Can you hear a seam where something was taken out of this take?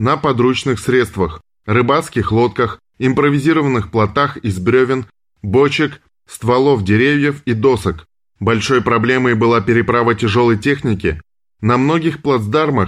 no; 0 cuts

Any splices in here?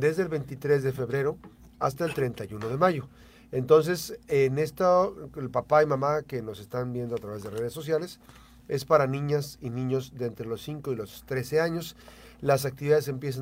no; 0 cuts

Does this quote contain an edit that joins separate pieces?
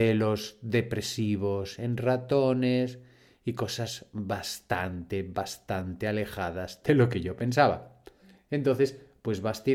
no; 0 cuts

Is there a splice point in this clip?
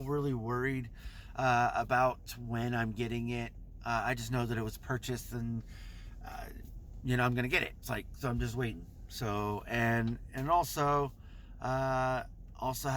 no; 0 cuts

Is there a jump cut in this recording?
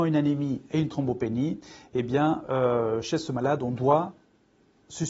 no; 0 cuts

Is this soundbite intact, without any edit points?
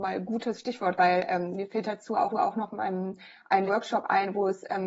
no; 3 cuts; at 1.0 s, 2.3 s, 3.7 s

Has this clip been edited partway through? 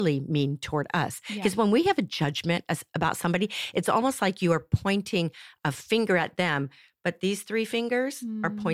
no; 0 cuts

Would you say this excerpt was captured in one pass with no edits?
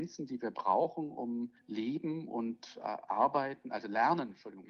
no; 1 cut; at 1.6 s

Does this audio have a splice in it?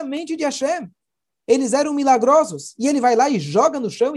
no; 0 cuts

